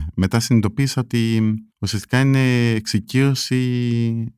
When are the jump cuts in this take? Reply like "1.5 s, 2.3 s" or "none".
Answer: 1.7 s

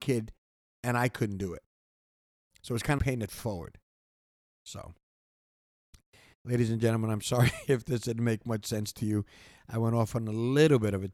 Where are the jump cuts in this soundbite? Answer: 3.0 s

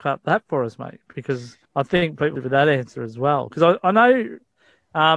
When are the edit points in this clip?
1.6 s, 2.4 s

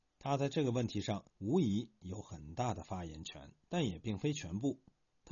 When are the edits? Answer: 1.3 s, 3.6 s

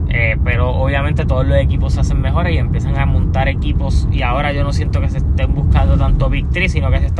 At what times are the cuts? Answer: none

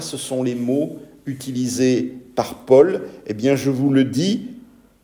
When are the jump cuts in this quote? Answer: none

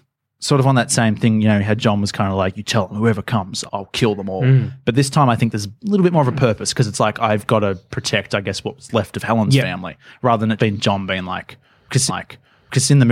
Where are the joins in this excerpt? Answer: 3.7 s, 10.6 s, 12.1 s

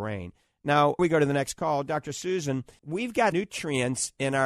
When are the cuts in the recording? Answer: 1.0 s, 2.8 s, 3.3 s

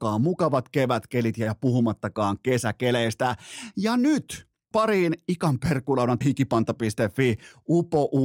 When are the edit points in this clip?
4.7 s, 6.2 s

